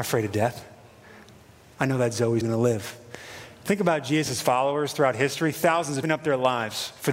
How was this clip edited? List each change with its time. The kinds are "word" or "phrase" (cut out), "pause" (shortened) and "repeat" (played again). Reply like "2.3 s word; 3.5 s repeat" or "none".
2.4 s word; 6.0 s phrase